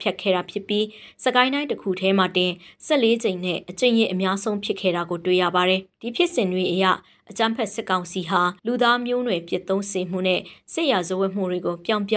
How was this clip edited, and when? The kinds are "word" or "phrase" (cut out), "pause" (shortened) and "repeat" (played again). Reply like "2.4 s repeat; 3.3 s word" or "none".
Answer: 5.9 s pause; 8.6 s pause